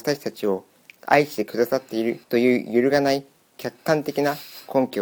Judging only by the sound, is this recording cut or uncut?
cut